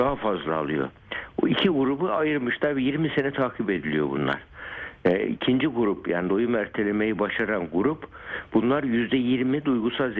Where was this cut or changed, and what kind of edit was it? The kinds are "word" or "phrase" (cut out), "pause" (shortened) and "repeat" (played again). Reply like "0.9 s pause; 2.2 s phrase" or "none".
none